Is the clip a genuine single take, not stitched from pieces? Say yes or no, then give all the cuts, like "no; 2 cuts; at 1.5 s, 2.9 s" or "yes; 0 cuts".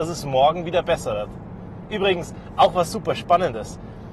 yes; 0 cuts